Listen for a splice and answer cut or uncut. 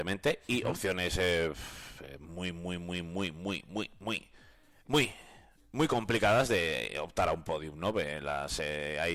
uncut